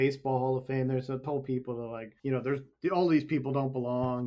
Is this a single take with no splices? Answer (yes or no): no